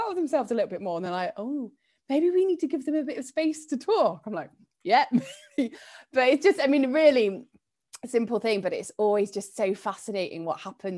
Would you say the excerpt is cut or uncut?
uncut